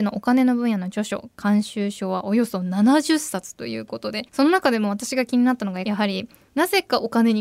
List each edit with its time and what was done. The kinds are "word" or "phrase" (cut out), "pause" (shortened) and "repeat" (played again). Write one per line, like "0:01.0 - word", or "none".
0:04.3 - pause